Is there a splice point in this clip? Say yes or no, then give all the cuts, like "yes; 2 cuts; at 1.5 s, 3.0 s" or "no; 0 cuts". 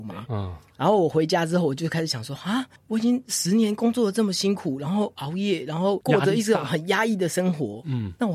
yes; 1 cut; at 2.8 s